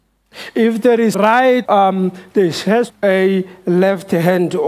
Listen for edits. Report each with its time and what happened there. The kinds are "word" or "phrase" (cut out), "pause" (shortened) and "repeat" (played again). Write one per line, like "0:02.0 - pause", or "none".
0:01.1 - word
0:01.6 - word
0:02.9 - phrase

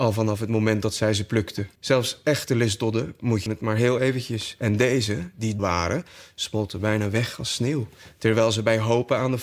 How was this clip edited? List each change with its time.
0:01.8 - pause
0:03.5 - phrase
0:05.6 - word

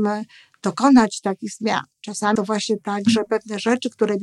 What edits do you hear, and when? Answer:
0:02.4 - phrase

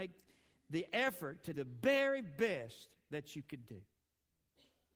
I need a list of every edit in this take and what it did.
0:01.5 - word

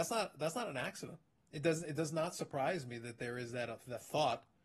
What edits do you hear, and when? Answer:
none

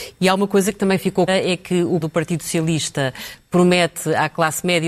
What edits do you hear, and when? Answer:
0:01.3 - word
0:02.0 - word

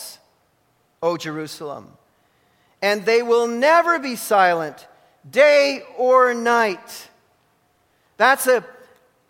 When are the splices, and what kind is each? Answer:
none

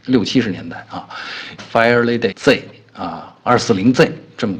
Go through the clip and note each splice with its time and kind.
0:01.6 - phrase
0:02.3 - word

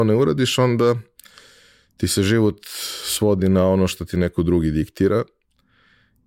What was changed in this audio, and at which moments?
none

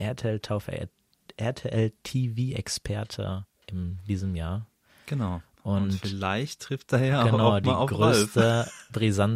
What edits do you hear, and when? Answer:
none

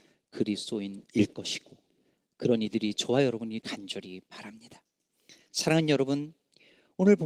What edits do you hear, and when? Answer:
0:03.6 - word

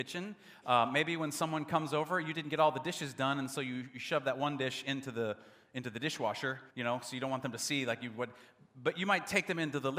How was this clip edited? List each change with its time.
0:06.7 - pause

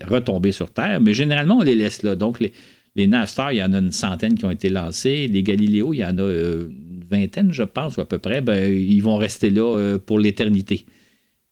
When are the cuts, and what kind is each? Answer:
none

